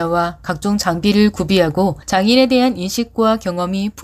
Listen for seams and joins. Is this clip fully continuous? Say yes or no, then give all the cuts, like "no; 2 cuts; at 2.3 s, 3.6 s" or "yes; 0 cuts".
no; 1 cut; at 2.0 s